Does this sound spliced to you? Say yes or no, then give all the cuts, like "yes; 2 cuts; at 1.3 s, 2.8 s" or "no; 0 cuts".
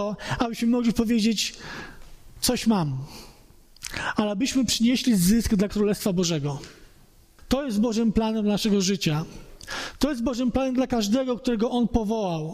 no; 0 cuts